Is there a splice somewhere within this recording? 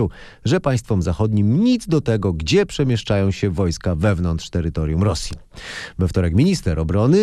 no; 0 cuts

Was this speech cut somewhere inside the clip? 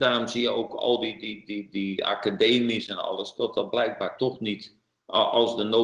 no; 0 cuts

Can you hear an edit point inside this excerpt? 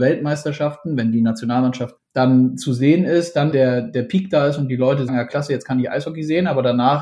yes; 3 cuts; at 2.0 s, 3.5 s, 5.1 s

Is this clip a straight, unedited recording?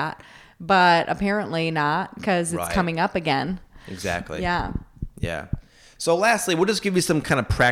yes; 0 cuts

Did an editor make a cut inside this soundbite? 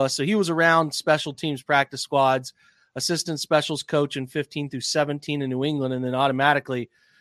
no; 0 cuts

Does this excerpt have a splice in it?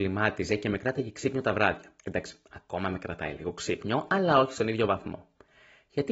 yes; 1 cut; at 2.0 s

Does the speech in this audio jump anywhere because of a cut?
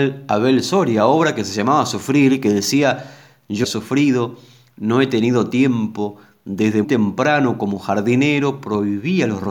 yes; 2 cuts; at 3.6 s, 6.8 s

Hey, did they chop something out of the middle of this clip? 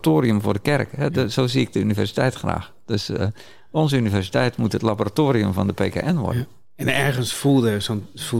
no; 0 cuts

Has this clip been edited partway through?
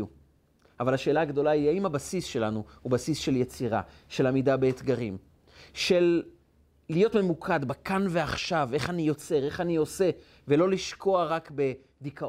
no; 0 cuts

